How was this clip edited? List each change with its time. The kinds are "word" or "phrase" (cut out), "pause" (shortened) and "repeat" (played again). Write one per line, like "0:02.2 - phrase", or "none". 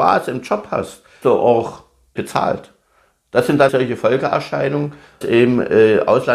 0:01.2 - word
0:02.2 - word
0:03.7 - word
0:05.2 - word

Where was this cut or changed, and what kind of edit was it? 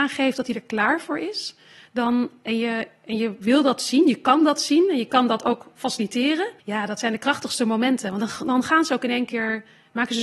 0:06.6 - pause

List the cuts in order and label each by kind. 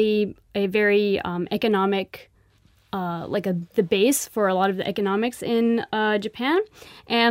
none

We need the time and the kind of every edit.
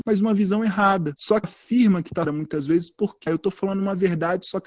0:01.4 - word
0:02.2 - phrase
0:03.3 - word

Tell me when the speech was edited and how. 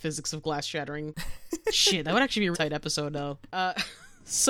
0:02.5 - word
0:03.5 - pause

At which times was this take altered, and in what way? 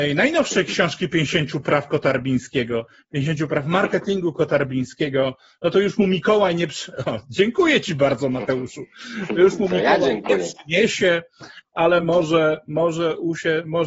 none

